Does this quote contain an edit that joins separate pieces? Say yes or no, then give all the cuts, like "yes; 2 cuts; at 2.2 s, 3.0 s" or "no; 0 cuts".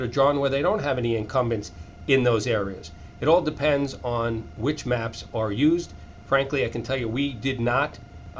no; 0 cuts